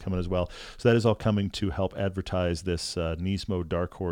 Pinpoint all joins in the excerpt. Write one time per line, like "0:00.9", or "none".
none